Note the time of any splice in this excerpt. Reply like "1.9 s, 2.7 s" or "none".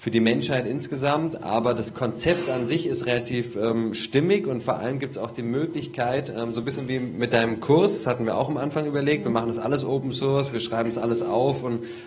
none

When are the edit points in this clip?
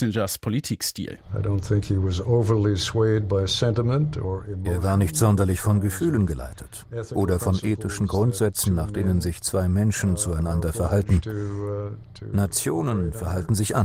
none

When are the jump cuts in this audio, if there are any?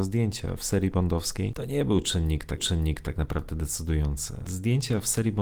2.6 s

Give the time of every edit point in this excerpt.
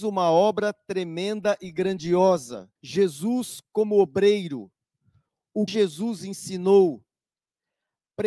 2.8 s, 5.7 s

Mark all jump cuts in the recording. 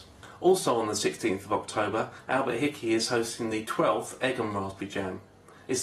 none

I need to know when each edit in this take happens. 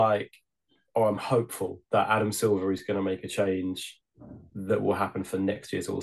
1.8 s

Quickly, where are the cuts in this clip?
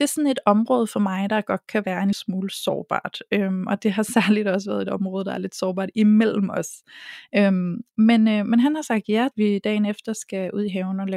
2.1 s, 9.3 s

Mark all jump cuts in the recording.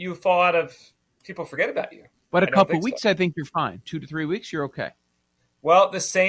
none

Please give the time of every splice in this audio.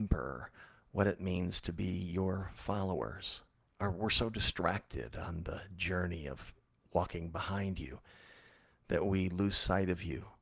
none

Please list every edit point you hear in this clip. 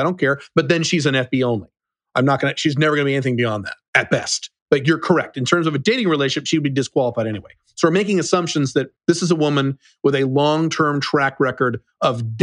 3.9 s, 4.6 s, 9.0 s

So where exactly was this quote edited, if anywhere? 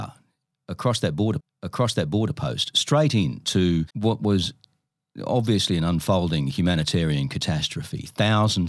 1.4 s, 3.9 s

